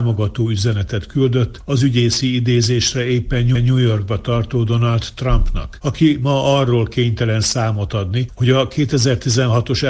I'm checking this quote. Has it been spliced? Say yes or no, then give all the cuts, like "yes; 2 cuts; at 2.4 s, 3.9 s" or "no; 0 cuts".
yes; 1 cut; at 3.5 s